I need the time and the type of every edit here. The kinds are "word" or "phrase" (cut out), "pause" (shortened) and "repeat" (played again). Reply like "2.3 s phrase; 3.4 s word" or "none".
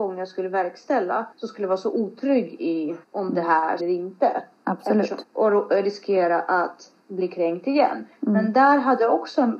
1.3 s pause; 3.0 s pause; 3.8 s phrase; 5.2 s word; 7.0 s pause